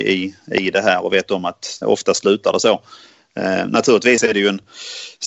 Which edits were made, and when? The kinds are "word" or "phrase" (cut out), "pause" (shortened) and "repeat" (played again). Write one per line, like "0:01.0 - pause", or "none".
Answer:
0:01.8 - word